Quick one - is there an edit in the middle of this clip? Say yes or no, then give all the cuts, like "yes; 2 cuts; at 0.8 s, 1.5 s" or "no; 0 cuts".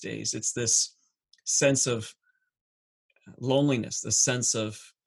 no; 0 cuts